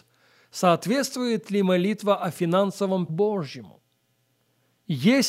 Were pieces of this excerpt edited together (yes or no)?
yes